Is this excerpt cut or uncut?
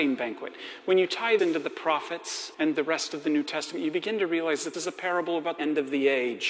cut